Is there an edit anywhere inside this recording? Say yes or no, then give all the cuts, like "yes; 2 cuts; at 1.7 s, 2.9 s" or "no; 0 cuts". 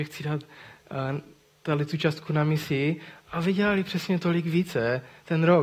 no; 0 cuts